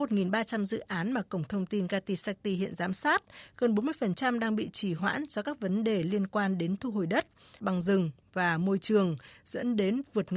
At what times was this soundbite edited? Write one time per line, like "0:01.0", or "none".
0:07.6